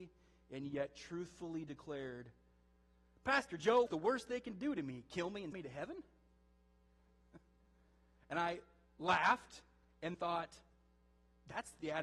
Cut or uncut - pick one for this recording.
cut